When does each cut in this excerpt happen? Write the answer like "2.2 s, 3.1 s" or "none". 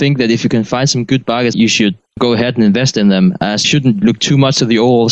1.5 s, 2.1 s, 3.6 s